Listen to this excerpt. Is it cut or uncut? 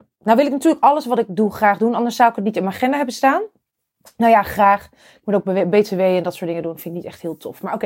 uncut